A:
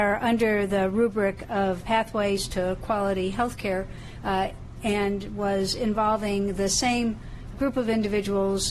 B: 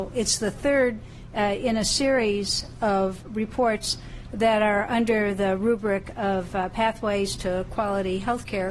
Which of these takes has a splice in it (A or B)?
A